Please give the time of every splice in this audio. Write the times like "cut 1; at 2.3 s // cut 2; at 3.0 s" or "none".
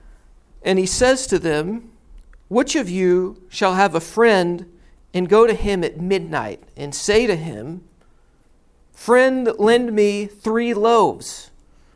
none